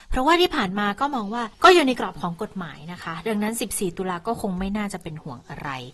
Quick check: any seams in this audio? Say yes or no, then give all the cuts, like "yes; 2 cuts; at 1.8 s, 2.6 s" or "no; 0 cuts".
yes; 1 cut; at 1.5 s